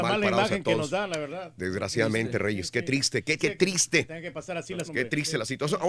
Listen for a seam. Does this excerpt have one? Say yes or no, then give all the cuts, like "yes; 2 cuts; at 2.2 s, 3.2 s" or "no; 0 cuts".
yes; 2 cuts; at 3.4 s, 4.9 s